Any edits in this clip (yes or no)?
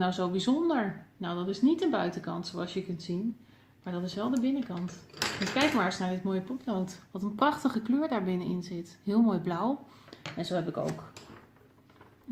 no